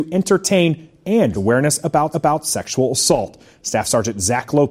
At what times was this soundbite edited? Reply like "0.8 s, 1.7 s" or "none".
1.3 s, 2.1 s